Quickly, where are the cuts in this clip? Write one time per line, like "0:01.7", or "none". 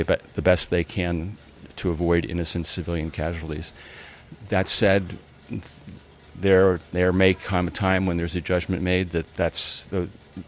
none